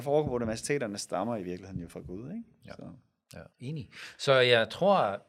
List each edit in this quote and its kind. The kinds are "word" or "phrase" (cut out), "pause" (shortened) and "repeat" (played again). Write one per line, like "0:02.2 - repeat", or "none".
0:03.5 - pause

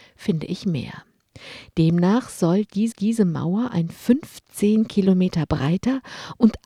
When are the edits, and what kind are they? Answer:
0:02.9 - repeat

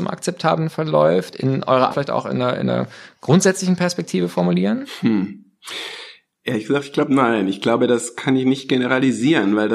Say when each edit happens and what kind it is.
0:01.9 - phrase

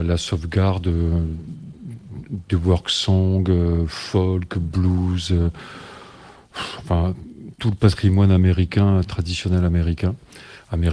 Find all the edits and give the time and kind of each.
none

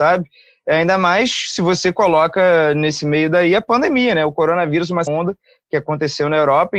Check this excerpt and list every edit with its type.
0:05.1 - word

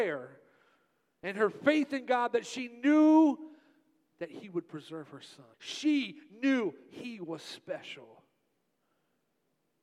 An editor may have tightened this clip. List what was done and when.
0:05.5 - pause

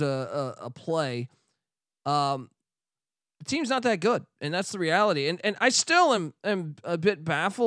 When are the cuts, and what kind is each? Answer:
none

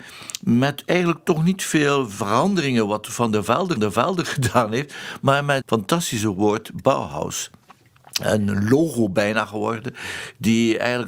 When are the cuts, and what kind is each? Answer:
0:03.8 - repeat
0:05.6 - word

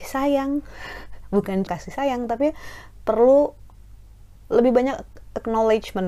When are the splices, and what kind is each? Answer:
0:01.7 - word

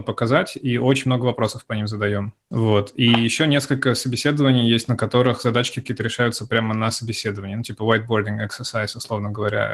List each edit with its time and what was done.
none

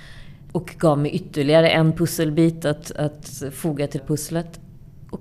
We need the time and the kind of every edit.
0:04.0 - phrase

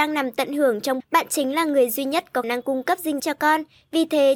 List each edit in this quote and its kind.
0:01.0 - word
0:02.4 - word
0:03.2 - word

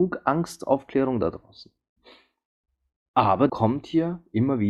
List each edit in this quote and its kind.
0:03.5 - word

